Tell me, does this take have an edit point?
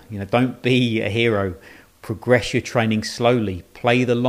no; 0 cuts

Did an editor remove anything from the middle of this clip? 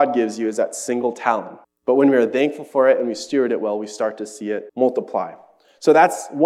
yes; 2 cuts; at 1.6 s, 4.7 s

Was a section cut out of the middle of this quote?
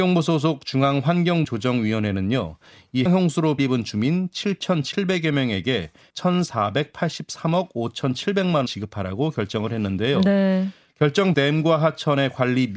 yes; 6 cuts; at 1.4 s, 3.1 s, 3.6 s, 6.1 s, 8.7 s, 11.3 s

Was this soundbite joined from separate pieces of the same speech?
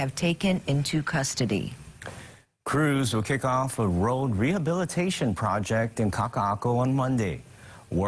no; 0 cuts

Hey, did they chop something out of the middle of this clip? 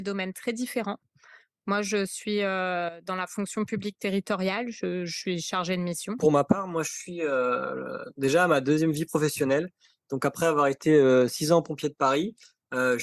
no; 0 cuts

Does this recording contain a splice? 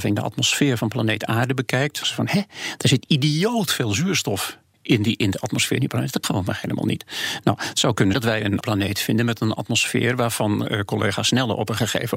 yes; 4 cuts; at 2.0 s, 6.2 s, 8.1 s, 8.6 s

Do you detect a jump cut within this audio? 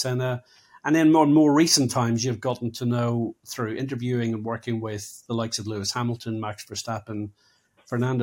no; 0 cuts

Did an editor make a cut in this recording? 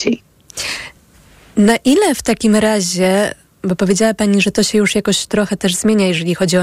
no; 0 cuts

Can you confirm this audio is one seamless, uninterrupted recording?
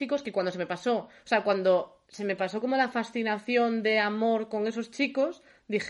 yes; 0 cuts

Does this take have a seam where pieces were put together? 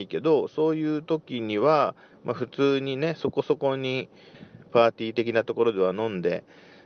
no; 0 cuts

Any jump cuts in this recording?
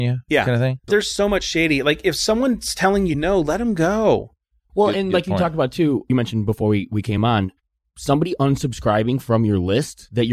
no; 0 cuts

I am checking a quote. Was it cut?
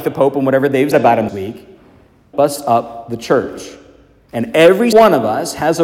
yes; 4 cuts; at 0.9 s, 1.3 s, 2.3 s, 4.9 s

